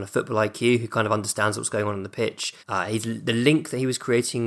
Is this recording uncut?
no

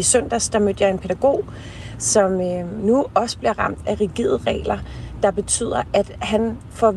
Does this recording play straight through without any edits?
yes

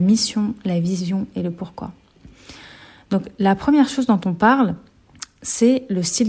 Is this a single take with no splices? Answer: yes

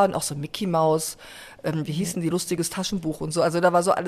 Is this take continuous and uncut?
yes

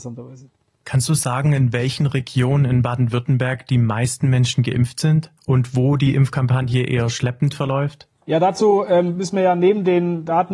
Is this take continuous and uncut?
no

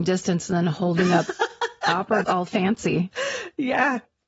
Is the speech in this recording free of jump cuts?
no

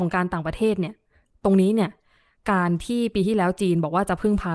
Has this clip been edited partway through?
no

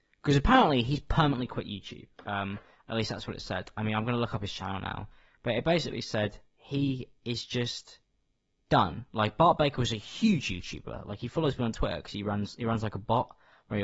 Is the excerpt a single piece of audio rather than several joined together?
yes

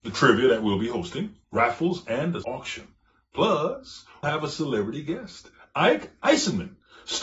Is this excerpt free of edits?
no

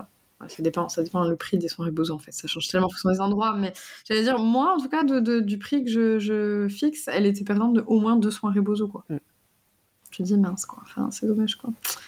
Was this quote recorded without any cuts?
yes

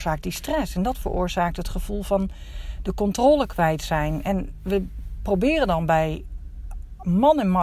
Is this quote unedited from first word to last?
yes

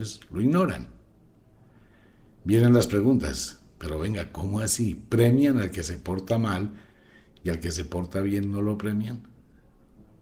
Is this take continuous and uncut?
yes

